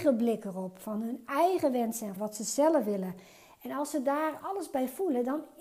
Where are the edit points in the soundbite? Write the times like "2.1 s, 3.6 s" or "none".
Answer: 2.2 s, 4.4 s